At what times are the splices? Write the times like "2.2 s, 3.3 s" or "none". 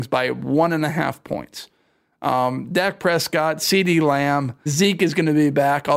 4.7 s

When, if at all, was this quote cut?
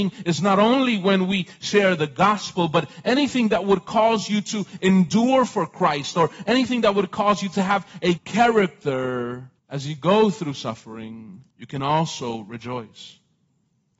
8.2 s, 9.6 s, 11.5 s

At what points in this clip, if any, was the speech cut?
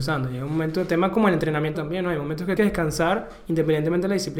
1.7 s, 2.6 s

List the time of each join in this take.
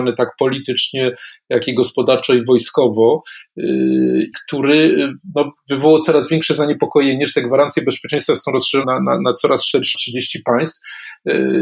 4.3 s, 8.8 s, 9.9 s

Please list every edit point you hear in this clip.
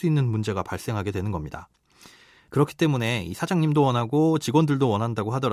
none

